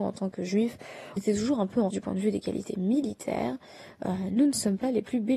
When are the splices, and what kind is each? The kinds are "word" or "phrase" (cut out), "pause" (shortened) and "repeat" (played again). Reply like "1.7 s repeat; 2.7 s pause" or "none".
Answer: 1.2 s word; 1.9 s word